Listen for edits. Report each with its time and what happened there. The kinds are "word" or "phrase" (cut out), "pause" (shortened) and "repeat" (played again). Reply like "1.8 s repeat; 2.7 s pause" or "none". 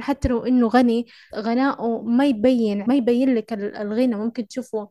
1.3 s word; 2.8 s word